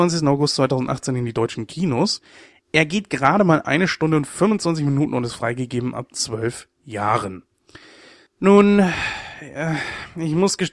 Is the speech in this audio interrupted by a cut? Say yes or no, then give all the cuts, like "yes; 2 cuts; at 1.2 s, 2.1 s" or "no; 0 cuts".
no; 0 cuts